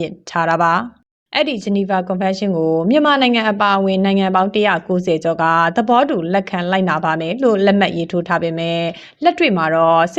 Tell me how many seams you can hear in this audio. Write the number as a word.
zero